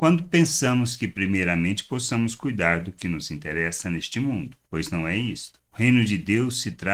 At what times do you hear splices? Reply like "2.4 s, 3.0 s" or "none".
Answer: 4.6 s, 5.7 s